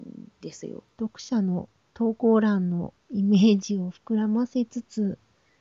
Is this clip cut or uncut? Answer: cut